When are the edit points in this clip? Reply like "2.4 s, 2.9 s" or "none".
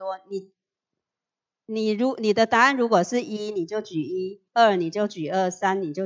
4.5 s